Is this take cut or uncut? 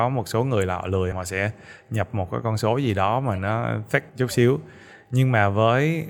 cut